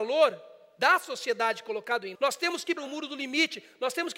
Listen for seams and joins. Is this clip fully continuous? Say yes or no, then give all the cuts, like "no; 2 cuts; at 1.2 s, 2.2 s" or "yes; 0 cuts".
no; 2 cuts; at 2.1 s, 2.8 s